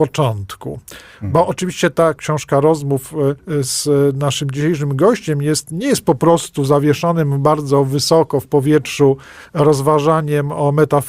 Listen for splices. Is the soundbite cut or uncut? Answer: cut